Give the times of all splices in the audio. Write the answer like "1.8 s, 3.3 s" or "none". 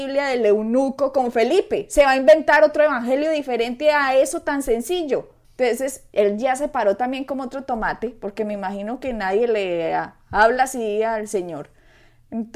5.4 s